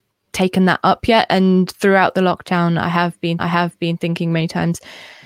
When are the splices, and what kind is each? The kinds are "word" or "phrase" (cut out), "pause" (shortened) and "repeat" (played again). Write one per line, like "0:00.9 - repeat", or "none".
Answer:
0:03.4 - repeat

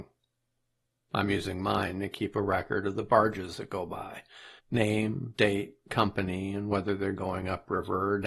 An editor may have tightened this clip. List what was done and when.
0:04.6 - pause

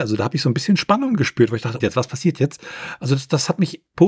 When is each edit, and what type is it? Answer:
0:01.8 - phrase

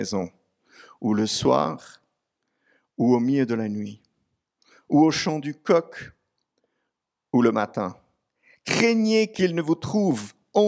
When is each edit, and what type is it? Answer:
none

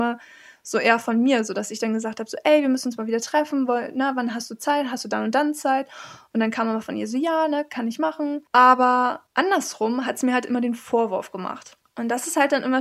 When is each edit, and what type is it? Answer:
none

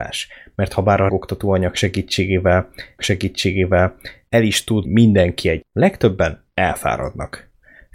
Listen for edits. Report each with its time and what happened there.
0:01.1 - word
0:03.0 - repeat
0:04.8 - word
0:05.6 - word

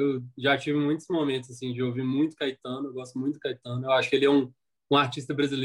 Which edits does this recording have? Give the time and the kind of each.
none

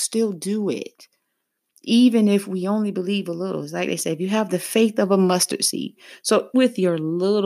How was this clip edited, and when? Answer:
0:06.5 - word

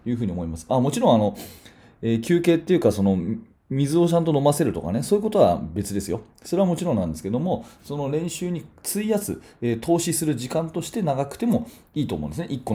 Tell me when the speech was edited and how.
none

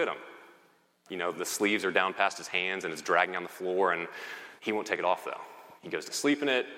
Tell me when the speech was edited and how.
0:01.3 - word
0:04.6 - pause
0:05.8 - pause

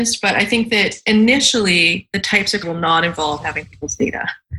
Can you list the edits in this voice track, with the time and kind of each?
0:02.6 - word

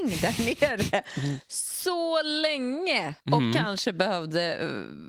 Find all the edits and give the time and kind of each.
0:03.2 - pause

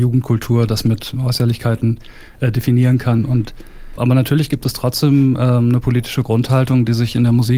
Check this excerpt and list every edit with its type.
0:04.0 - word

